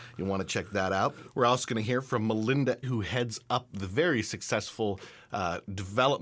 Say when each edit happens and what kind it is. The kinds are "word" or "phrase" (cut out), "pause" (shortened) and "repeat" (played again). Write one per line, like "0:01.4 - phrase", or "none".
0:02.8 - word